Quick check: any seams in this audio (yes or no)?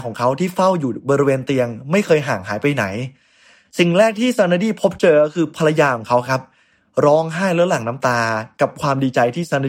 no